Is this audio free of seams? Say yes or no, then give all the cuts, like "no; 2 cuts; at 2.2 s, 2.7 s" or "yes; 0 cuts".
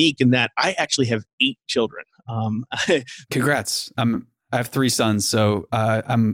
yes; 0 cuts